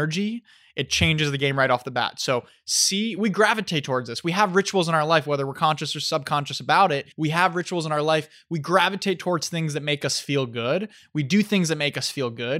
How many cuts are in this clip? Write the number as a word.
two